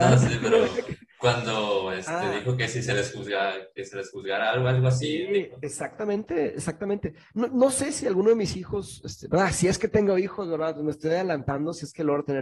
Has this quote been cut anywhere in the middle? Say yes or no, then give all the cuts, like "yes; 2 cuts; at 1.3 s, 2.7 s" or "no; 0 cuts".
no; 0 cuts